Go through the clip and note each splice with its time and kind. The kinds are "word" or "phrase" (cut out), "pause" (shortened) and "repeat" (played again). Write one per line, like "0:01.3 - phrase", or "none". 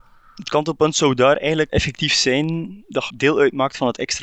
0:01.7 - word
0:03.1 - word